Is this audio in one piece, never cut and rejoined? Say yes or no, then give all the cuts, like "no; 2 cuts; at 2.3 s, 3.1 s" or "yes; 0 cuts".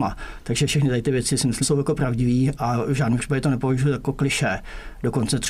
no; 1 cut; at 1.6 s